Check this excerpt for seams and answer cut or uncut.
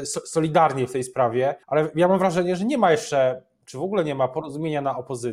cut